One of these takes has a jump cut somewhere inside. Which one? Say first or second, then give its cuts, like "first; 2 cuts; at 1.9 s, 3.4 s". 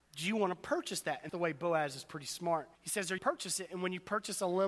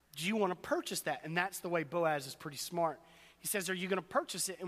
first; 3 cuts; at 1.3 s, 2.7 s, 3.2 s